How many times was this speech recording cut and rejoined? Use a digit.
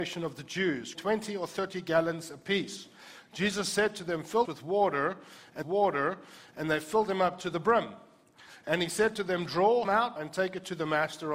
5